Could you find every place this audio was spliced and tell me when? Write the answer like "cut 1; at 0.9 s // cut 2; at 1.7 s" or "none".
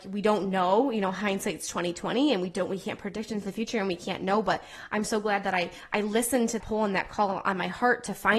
cut 1; at 6.6 s